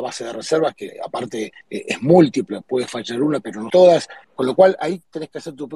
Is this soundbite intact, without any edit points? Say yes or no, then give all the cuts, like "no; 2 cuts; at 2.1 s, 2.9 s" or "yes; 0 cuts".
no; 3 cuts; at 1.6 s, 3.7 s, 4.2 s